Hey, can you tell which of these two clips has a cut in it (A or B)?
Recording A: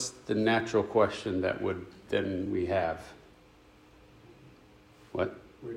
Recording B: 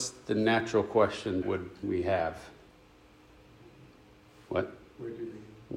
B